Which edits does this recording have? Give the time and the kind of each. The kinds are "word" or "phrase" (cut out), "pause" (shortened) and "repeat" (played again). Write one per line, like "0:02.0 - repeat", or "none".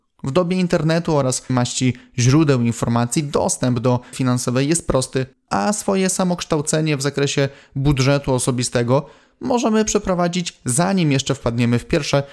0:01.5 - word
0:04.1 - word
0:05.3 - word